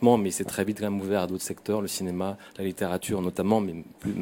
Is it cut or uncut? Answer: uncut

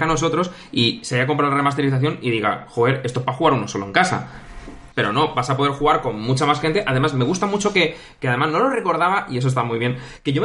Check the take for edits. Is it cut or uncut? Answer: cut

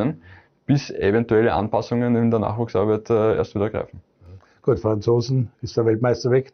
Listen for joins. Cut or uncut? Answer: uncut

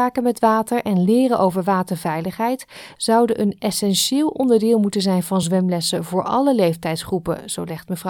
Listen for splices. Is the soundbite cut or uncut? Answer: uncut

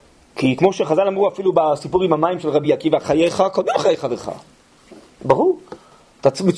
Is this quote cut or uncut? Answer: uncut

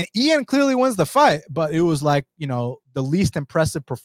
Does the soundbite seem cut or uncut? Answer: cut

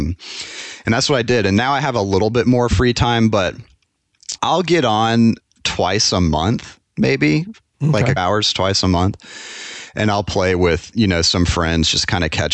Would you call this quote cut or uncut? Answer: cut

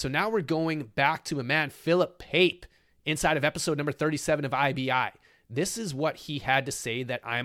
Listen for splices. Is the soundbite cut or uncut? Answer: uncut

